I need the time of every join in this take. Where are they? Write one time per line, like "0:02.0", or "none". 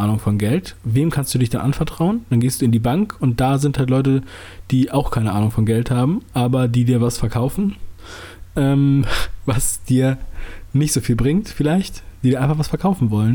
none